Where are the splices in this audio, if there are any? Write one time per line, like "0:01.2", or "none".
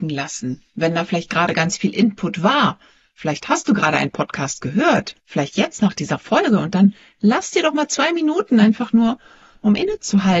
0:05.2